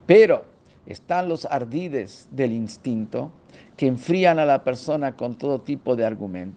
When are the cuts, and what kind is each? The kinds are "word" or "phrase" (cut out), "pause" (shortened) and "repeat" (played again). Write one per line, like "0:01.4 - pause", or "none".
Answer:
none